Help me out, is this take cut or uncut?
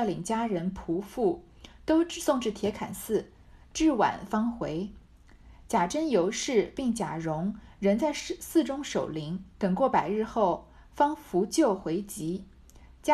cut